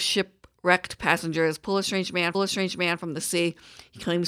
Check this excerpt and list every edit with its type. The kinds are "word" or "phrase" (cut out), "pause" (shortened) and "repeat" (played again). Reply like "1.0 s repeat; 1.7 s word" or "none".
2.3 s repeat

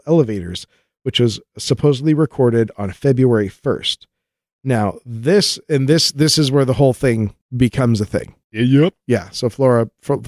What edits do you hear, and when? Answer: 8.4 s pause

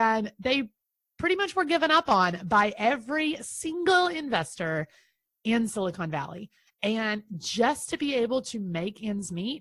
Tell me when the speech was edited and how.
none

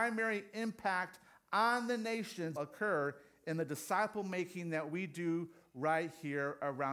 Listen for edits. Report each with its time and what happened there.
2.6 s word

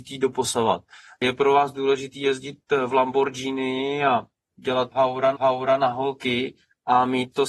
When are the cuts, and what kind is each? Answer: 5.3 s repeat

